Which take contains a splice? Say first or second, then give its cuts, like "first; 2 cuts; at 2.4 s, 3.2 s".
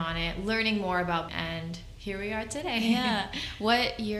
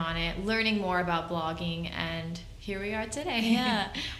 first; 1 cut; at 1.3 s